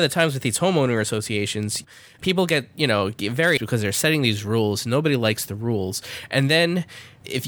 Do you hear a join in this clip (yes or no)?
yes